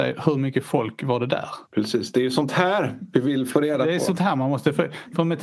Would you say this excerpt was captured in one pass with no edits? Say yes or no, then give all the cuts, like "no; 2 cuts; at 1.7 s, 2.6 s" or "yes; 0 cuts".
no; 1 cut; at 1.7 s